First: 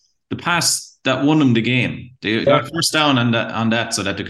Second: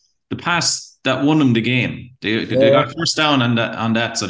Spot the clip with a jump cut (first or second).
first